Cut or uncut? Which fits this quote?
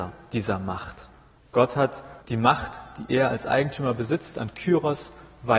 cut